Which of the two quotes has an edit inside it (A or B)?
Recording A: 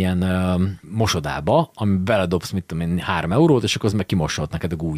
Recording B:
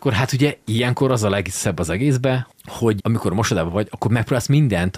B